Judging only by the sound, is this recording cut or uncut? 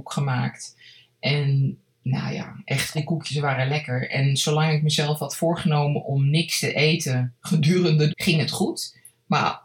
cut